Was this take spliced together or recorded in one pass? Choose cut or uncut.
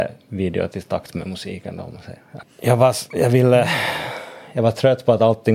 cut